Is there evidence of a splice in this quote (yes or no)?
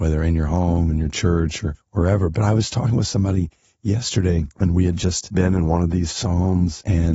no